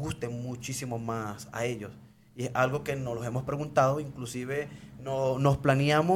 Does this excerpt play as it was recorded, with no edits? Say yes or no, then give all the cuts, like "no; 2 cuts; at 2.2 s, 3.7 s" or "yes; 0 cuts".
yes; 0 cuts